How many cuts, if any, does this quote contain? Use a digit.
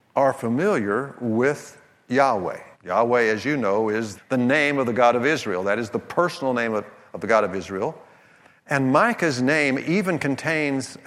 2